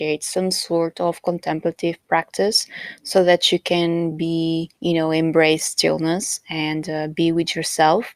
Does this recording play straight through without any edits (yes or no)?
no